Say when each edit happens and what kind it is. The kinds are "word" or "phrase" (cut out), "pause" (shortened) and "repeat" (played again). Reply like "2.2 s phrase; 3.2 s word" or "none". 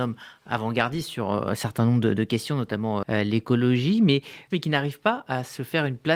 3.0 s word; 4.5 s word

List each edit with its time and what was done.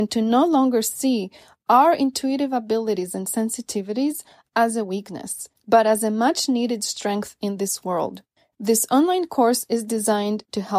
none

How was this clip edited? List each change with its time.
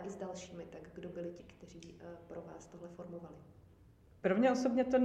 1.4 s word

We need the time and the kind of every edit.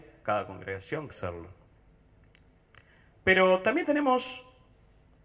1.1 s phrase

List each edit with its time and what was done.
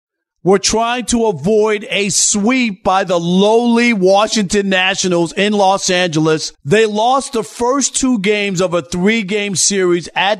6.5 s pause

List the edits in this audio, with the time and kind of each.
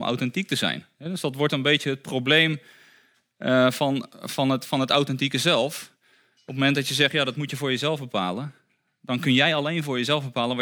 none

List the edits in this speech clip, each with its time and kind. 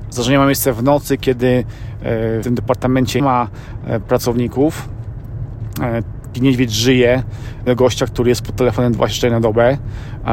2.4 s word; 3.2 s word; 6.3 s word; 7.7 s word

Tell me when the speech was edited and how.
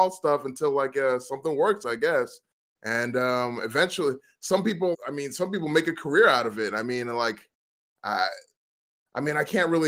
4.9 s word

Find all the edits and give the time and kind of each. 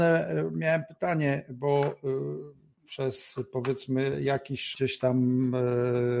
4.7 s word

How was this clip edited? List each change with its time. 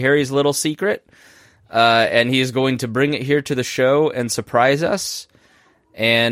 none

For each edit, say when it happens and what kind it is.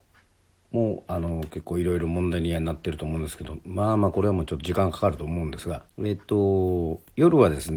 5.9 s pause

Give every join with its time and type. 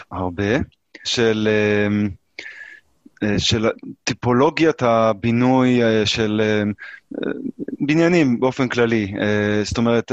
1.0 s word

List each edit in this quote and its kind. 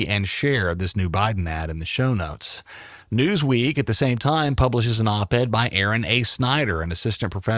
3.0 s pause

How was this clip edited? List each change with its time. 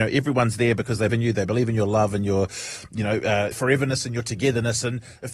1.1 s word; 3.5 s word

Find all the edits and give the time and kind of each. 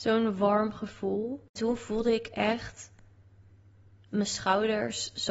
none

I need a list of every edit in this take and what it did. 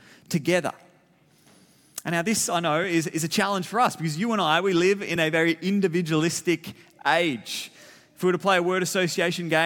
none

